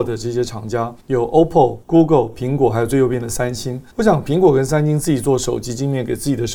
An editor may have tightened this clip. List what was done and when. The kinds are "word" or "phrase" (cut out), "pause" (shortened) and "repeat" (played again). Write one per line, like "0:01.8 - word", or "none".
0:01.0 - pause
0:01.8 - pause
0:03.9 - pause